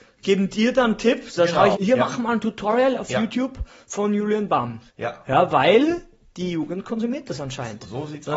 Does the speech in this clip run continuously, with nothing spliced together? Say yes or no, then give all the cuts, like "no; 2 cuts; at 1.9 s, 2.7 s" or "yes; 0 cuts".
no; 2 cuts; at 1.7 s, 4.9 s